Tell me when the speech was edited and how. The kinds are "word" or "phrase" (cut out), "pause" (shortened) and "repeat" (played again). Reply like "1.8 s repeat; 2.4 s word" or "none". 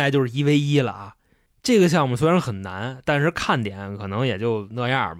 none